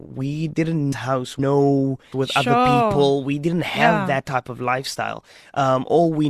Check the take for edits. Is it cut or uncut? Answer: cut